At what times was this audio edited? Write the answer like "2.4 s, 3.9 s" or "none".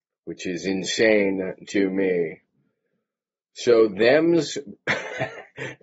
none